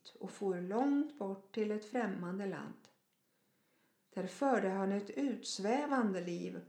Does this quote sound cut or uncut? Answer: uncut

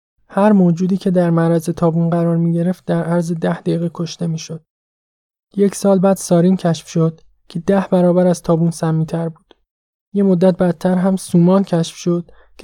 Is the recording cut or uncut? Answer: uncut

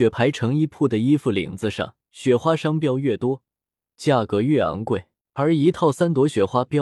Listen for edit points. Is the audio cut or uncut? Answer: cut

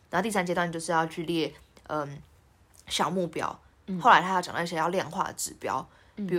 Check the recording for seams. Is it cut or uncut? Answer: uncut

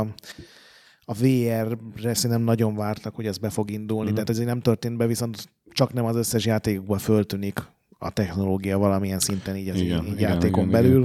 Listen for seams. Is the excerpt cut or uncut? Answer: uncut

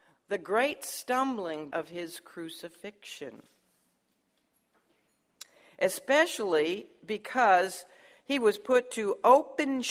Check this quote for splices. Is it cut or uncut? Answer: cut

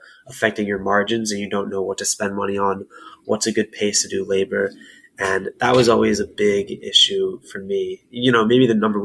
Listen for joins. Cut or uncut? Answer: uncut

